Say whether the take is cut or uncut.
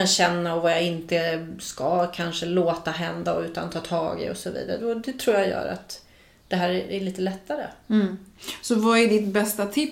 uncut